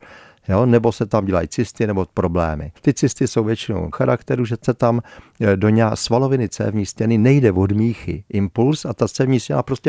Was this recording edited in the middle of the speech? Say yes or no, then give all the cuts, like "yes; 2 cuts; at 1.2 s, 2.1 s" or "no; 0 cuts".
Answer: yes; 2 cuts; at 2.8 s, 3.9 s